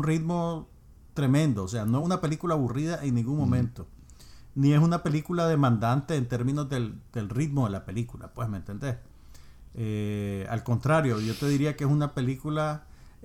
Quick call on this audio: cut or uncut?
uncut